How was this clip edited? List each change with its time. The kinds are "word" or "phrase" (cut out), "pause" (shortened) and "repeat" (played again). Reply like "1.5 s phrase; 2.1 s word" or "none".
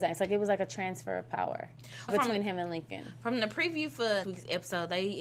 2.1 s word; 4.2 s word